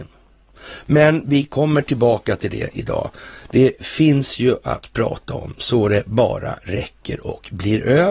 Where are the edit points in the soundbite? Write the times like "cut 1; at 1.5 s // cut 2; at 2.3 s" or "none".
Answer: none

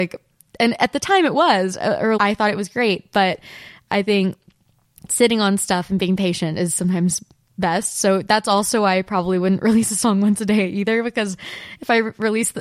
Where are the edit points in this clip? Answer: cut 1; at 2.2 s

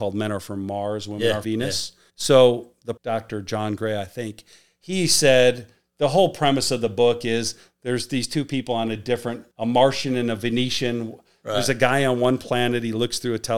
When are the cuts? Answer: cut 1; at 1.4 s // cut 2; at 2.1 s // cut 3; at 3.0 s // cut 4; at 9.5 s

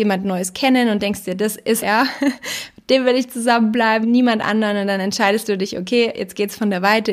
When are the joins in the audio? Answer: cut 1; at 1.8 s // cut 2; at 4.0 s

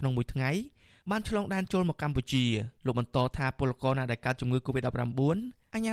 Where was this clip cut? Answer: cut 1; at 2.8 s

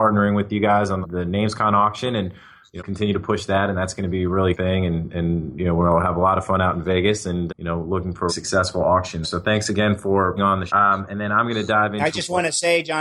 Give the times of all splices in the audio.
cut 1; at 1.0 s // cut 2; at 2.8 s // cut 3; at 4.5 s // cut 4; at 7.5 s // cut 5; at 8.3 s // cut 6; at 9.2 s // cut 7; at 10.4 s // cut 8; at 10.7 s

